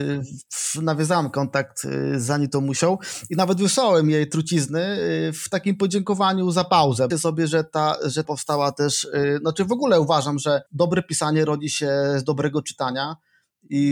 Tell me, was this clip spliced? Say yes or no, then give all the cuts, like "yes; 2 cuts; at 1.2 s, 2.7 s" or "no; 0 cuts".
yes; 3 cuts; at 7.1 s, 8.2 s, 10.7 s